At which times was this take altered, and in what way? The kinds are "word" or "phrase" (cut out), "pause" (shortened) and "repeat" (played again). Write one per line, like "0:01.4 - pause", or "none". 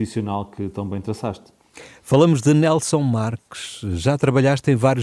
none